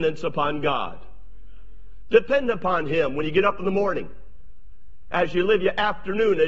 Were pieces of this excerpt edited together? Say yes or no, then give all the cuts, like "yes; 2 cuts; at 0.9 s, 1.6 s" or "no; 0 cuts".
no; 0 cuts